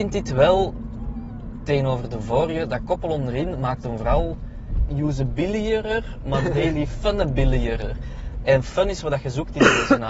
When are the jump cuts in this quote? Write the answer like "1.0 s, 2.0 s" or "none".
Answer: 4.9 s